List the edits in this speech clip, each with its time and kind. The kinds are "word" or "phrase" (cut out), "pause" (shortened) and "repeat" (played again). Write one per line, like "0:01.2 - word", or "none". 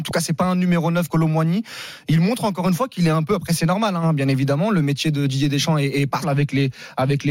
0:01.1 - word
0:06.2 - word